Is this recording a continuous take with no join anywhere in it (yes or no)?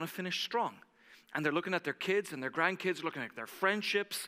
yes